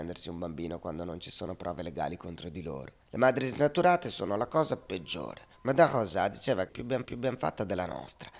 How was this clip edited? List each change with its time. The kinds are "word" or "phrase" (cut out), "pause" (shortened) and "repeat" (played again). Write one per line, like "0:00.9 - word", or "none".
0:03.0 - pause
0:05.5 - pause
0:06.7 - phrase
0:07.0 - repeat

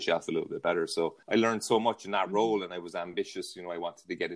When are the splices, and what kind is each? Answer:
0:01.2 - pause

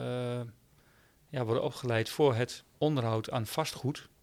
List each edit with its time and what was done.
0:02.7 - pause

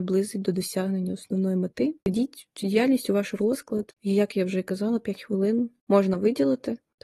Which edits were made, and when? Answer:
0:02.0 - pause

